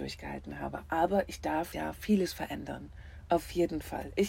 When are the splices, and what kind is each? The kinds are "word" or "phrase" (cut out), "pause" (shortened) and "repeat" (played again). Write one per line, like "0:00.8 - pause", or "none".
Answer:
0:01.7 - word